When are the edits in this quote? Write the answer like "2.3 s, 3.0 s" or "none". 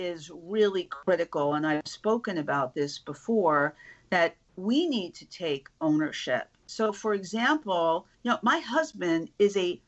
8.1 s